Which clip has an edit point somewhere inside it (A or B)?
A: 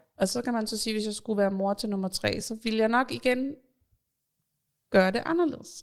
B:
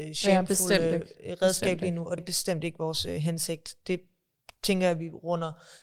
B